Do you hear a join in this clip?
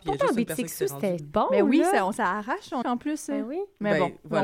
yes; 2 cuts; at 1.2 s, 2.8 s

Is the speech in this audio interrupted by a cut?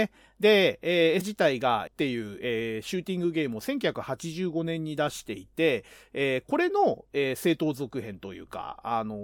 yes; 2 cuts; at 1.2 s, 1.9 s

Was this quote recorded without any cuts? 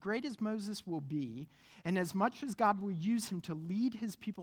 yes; 0 cuts

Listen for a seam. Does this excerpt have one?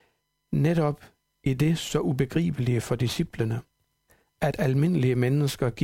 no; 0 cuts

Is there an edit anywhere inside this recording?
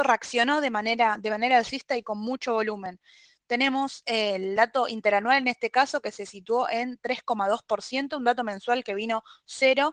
no; 0 cuts

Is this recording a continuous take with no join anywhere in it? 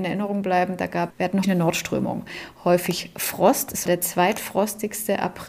no; 3 cuts; at 1.1 s, 1.4 s, 3.9 s

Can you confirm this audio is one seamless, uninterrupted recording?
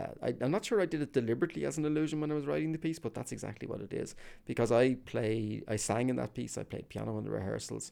yes; 0 cuts

